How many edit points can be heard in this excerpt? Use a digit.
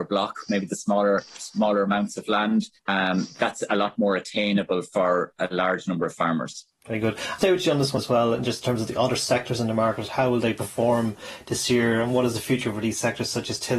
3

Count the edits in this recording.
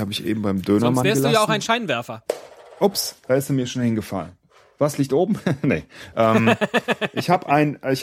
0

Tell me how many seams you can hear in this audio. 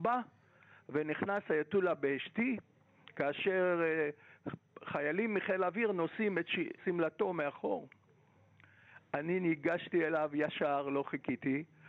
1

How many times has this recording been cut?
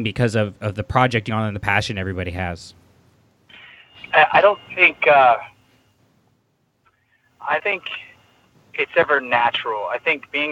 2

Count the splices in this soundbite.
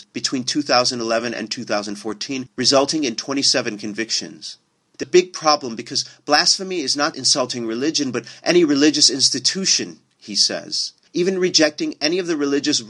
2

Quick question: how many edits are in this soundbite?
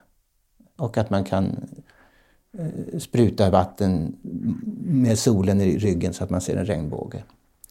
0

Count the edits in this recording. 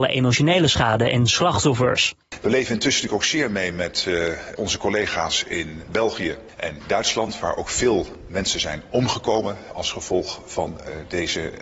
0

